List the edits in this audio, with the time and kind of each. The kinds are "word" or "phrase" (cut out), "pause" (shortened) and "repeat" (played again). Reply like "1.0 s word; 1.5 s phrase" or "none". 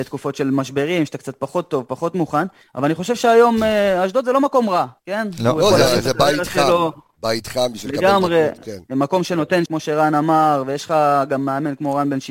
2.6 s pause; 5.0 s pause; 9.7 s word